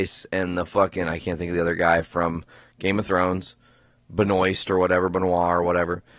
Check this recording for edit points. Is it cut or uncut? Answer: uncut